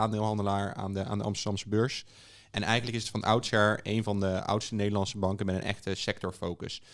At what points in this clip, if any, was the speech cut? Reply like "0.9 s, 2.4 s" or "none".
none

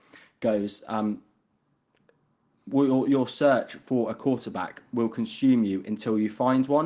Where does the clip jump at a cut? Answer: none

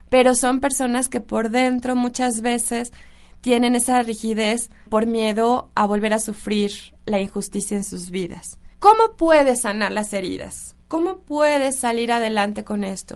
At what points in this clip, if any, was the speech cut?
4.9 s, 7.0 s, 8.7 s

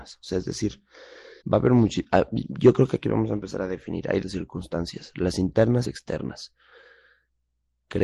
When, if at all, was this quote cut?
1.4 s, 4.2 s, 5.8 s

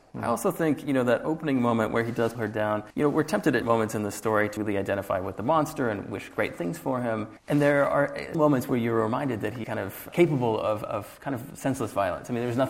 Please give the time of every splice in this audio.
2.3 s, 2.9 s, 3.6 s, 4.6 s, 7.4 s, 8.3 s, 9.6 s, 10.1 s

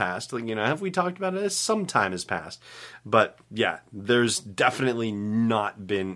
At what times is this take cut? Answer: 3.4 s

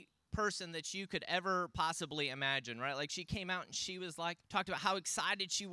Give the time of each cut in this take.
4.4 s

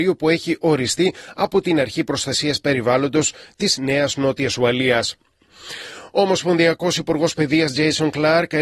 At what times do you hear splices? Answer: none

